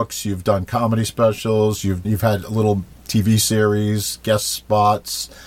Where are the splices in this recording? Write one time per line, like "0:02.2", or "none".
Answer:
0:02.0